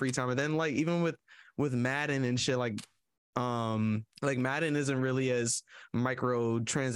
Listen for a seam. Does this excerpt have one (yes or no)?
yes